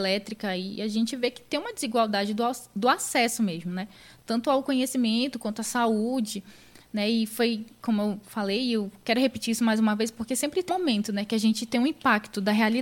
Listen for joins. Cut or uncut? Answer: cut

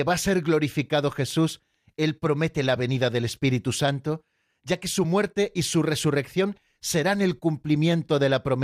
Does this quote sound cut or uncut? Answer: uncut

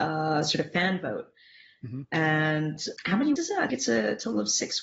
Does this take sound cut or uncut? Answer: cut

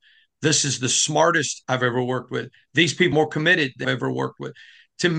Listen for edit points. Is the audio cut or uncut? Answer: cut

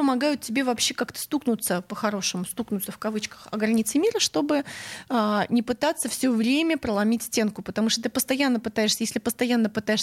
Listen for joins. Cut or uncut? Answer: uncut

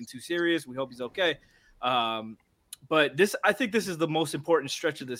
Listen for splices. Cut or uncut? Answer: uncut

